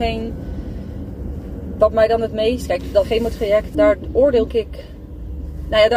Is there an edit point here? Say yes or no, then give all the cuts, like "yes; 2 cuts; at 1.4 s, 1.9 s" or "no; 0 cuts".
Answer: yes; 3 cuts; at 3.0 s, 3.7 s, 4.5 s